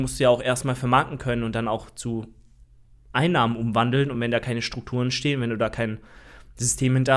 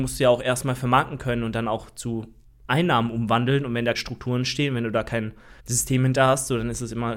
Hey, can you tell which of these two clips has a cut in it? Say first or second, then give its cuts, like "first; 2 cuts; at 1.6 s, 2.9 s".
second; 3 cuts; at 2.4 s, 3.9 s, 5.6 s